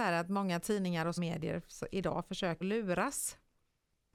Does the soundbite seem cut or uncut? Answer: cut